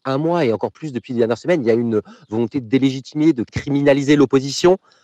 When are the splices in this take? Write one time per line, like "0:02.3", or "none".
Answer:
none